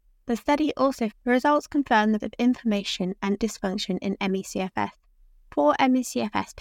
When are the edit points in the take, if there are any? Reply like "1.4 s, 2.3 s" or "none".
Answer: 1.1 s, 2.2 s, 3.4 s